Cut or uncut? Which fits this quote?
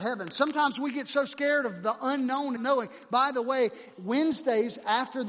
cut